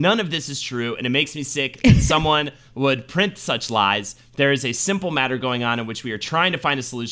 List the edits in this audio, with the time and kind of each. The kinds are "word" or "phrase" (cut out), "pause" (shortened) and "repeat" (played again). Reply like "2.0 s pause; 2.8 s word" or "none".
none